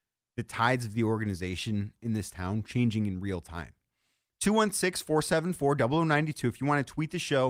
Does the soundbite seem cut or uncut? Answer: uncut